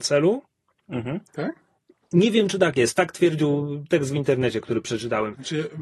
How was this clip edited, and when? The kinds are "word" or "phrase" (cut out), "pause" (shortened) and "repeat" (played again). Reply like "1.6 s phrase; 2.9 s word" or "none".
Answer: 1.3 s pause